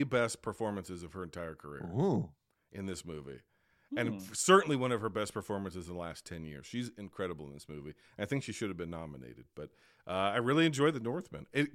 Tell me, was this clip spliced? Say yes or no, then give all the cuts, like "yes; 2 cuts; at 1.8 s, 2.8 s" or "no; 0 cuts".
no; 0 cuts